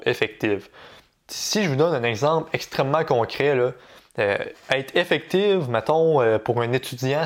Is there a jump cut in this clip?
no; 0 cuts

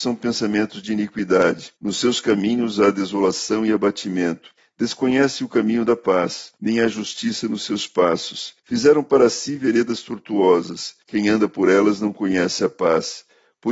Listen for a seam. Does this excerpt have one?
yes; 5 cuts; at 1.8 s, 4.6 s, 6.6 s, 8.6 s, 11.0 s

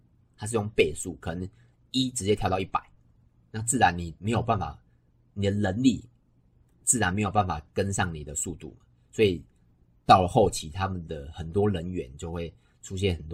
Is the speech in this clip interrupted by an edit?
no; 0 cuts

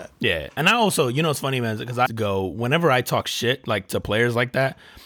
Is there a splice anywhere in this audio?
yes; 1 cut; at 2.1 s

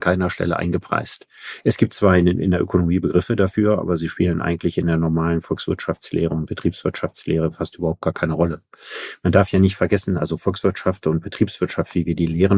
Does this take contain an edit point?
no; 0 cuts

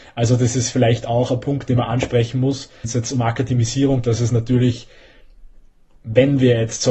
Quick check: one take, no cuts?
no; 2 cuts; at 2.8 s, 4.0 s

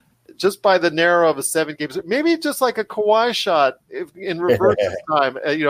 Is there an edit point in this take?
no; 0 cuts

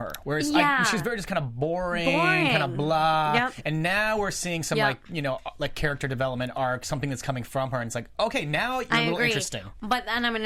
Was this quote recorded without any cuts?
yes; 0 cuts

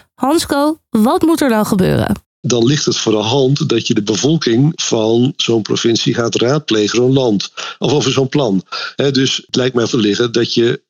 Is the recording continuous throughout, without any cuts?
no; 2 cuts; at 6.9 s, 9.9 s

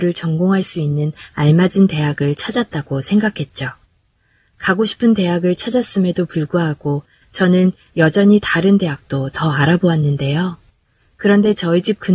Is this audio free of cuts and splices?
yes; 0 cuts

